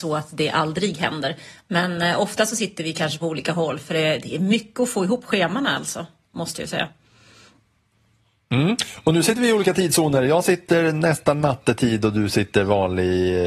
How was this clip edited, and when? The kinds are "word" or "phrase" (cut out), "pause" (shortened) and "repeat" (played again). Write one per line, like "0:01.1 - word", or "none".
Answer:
none